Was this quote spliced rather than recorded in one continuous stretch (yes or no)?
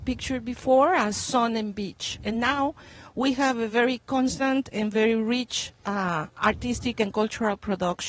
no